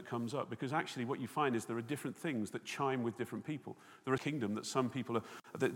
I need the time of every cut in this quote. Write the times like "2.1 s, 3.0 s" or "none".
4.2 s